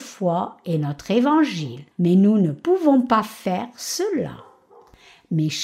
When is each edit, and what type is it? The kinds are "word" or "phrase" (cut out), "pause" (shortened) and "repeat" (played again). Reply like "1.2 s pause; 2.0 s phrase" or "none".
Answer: 1.9 s pause